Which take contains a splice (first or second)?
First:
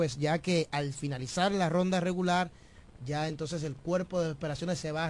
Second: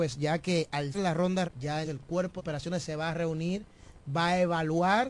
second